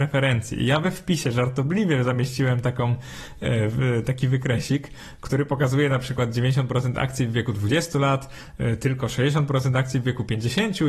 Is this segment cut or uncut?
uncut